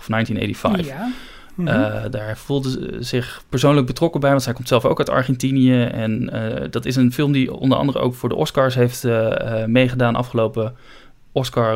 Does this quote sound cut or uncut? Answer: uncut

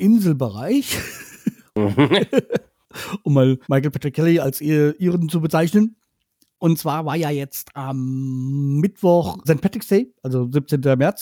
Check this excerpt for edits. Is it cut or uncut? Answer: cut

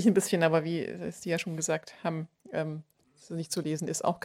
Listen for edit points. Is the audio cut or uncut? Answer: uncut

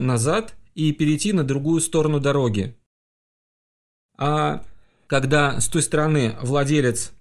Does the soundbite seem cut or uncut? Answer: uncut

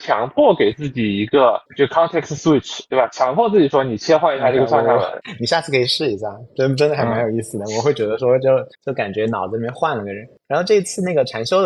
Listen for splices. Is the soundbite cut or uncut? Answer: cut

